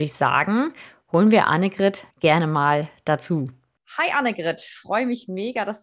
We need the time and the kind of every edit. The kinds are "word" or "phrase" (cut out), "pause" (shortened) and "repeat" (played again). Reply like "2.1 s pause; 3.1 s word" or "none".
2.1 s pause